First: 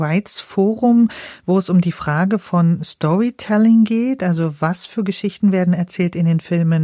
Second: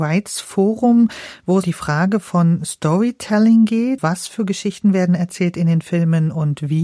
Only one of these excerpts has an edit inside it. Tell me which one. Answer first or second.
second